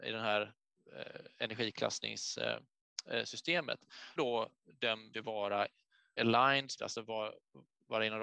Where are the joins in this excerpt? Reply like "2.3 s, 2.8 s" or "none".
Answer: 4.2 s, 5.1 s, 6.2 s, 6.8 s